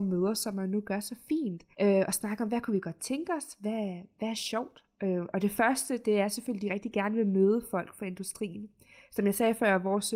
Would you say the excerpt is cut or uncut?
cut